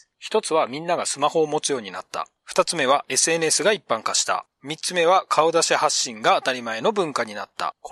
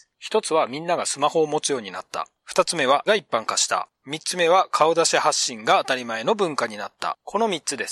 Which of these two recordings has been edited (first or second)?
second